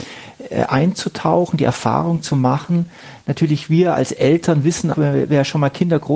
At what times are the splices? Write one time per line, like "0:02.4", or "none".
0:04.9